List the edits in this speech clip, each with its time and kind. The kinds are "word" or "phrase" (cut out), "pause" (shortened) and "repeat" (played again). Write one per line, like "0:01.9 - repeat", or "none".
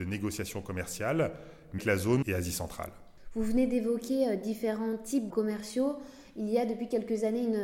0:01.8 - word
0:02.2 - word
0:05.3 - word